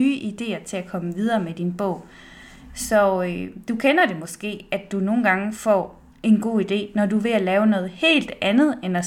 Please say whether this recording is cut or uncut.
cut